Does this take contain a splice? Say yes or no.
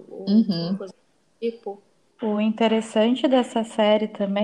no